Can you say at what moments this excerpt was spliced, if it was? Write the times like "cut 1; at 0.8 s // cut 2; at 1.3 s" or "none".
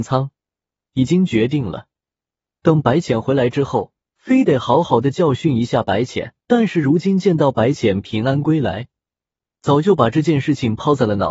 cut 1; at 6.4 s